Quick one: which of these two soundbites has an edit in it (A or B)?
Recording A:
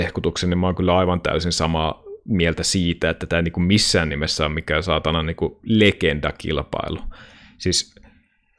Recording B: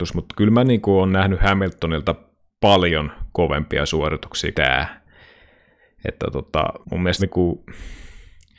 B